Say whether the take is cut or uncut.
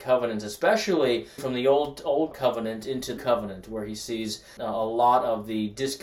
cut